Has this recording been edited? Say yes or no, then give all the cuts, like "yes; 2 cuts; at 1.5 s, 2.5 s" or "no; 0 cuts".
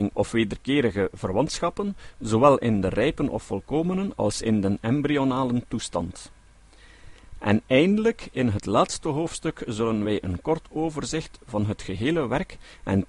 no; 0 cuts